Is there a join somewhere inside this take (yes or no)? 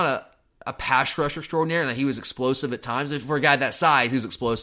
no